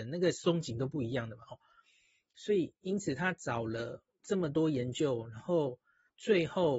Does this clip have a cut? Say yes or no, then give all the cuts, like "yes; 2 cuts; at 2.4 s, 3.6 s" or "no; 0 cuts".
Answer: no; 0 cuts